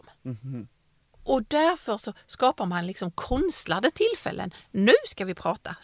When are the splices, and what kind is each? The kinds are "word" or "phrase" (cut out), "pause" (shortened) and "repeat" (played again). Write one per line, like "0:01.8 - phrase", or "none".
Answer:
none